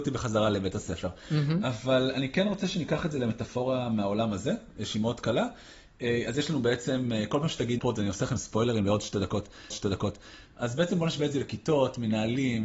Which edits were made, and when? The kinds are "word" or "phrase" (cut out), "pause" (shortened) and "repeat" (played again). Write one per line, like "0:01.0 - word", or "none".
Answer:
0:07.8 - phrase
0:09.7 - repeat